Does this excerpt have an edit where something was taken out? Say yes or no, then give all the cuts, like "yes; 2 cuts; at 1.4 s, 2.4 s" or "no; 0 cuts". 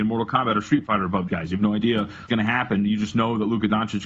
yes; 2 cuts; at 1.3 s, 2.3 s